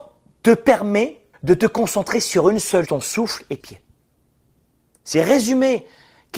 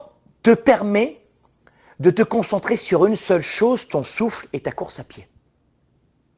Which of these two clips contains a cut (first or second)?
first